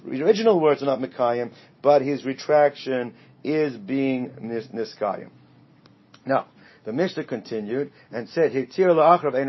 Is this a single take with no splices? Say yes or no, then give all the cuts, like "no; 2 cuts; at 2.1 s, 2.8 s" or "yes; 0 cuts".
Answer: yes; 0 cuts